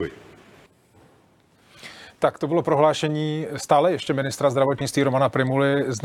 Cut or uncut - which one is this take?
uncut